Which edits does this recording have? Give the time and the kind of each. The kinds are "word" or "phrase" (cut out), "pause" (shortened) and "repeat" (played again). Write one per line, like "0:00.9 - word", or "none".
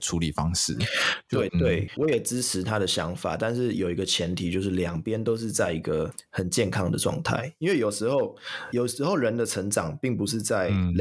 0:01.5 - phrase